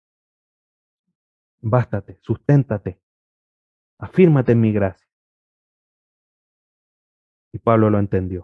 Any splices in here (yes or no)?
no